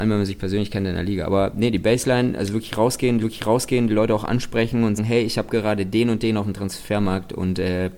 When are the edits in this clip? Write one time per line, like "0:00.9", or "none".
0:03.2
0:05.0